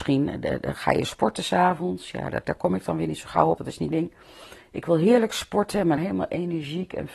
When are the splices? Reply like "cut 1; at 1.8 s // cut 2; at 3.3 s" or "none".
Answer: cut 1; at 2.4 s // cut 2; at 3.6 s // cut 3; at 3.9 s // cut 4; at 6.0 s